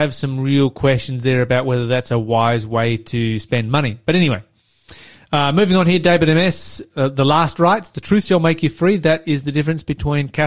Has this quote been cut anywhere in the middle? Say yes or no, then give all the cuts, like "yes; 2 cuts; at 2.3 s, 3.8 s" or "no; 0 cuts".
no; 0 cuts